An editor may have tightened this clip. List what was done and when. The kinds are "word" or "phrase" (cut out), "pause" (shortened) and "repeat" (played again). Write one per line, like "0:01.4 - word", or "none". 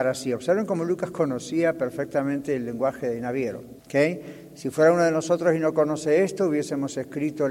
0:03.8 - pause